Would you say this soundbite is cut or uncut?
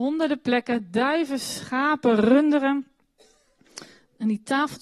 uncut